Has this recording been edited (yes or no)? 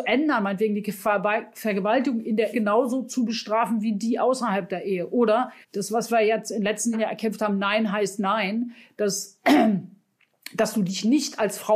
yes